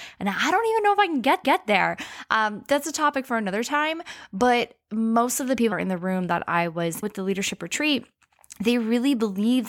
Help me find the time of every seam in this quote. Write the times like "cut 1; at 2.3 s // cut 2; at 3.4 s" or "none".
cut 1; at 1.4 s // cut 2; at 5.7 s // cut 3; at 7.0 s